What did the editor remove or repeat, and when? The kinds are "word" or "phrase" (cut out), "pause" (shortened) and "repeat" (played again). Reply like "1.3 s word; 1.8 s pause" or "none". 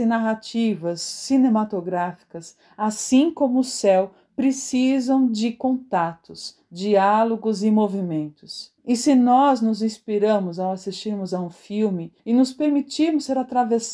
8.8 s pause; 12.2 s pause